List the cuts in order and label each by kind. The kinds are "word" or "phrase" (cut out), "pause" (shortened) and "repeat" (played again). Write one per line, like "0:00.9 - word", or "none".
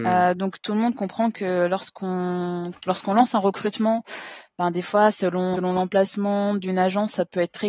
0:05.5 - word